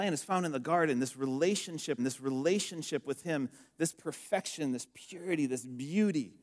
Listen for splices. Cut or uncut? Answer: cut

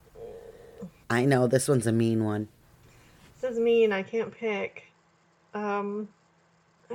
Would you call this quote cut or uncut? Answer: uncut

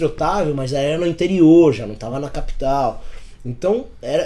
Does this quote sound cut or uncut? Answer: uncut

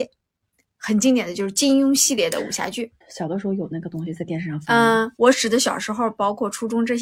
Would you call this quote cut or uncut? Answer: cut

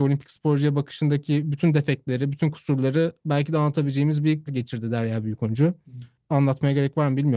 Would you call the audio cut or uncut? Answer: cut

